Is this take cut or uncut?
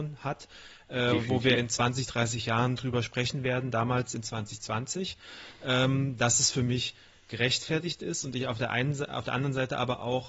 uncut